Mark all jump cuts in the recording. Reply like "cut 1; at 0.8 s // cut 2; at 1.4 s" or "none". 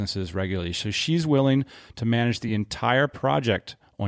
none